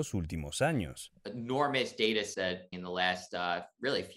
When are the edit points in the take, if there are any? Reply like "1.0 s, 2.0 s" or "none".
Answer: 2.3 s, 2.7 s